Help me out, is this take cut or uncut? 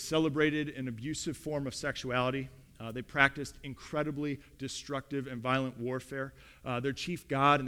uncut